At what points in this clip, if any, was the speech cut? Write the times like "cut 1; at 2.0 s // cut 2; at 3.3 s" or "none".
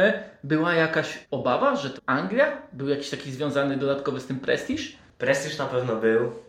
cut 1; at 1.2 s // cut 2; at 2.0 s